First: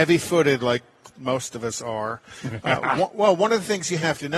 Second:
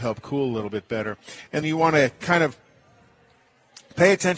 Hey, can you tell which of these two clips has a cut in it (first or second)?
second